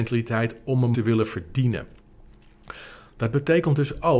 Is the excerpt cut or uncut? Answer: cut